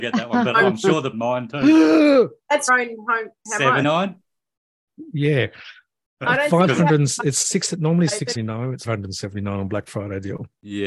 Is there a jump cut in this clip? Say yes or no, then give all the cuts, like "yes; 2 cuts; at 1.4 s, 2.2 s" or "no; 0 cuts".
yes; 6 cuts; at 1.1 s, 2.7 s, 3.8 s, 6.1 s, 8.4 s, 8.9 s